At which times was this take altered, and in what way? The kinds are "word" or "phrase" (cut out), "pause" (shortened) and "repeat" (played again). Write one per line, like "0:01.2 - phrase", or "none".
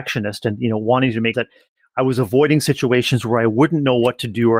0:01.3 - word